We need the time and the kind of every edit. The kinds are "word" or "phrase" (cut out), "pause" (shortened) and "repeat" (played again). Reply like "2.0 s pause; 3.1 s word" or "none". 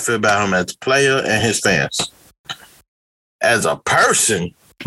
none